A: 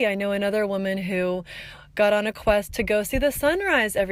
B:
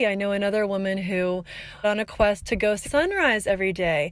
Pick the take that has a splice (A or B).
B